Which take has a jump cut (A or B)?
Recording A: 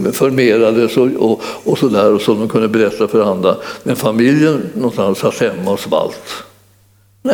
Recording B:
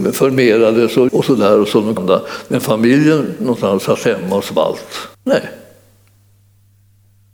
B